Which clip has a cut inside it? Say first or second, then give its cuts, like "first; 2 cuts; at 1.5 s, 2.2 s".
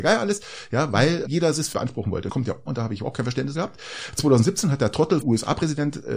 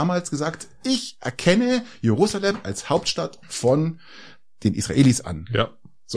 first; 6 cuts; at 1.3 s, 1.7 s, 2.3 s, 2.7 s, 3.5 s, 5.2 s